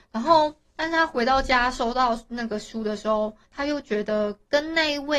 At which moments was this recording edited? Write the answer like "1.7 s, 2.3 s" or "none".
3.4 s